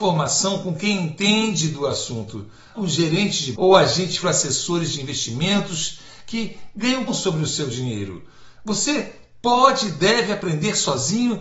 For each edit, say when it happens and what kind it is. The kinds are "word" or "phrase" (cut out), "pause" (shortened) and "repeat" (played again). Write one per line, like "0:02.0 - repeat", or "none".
0:02.7 - word
0:03.5 - word
0:04.2 - word
0:07.1 - word